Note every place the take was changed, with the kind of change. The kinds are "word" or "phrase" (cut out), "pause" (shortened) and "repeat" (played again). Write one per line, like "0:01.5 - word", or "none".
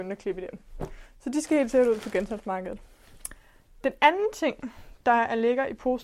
none